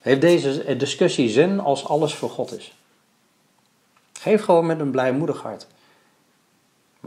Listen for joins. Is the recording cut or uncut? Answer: uncut